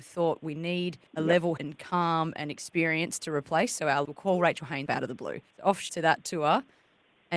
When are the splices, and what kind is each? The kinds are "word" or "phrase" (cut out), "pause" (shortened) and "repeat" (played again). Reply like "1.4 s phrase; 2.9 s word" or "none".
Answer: 1.1 s pause; 1.6 s word; 4.1 s phrase; 4.9 s word; 5.5 s pause; 5.9 s word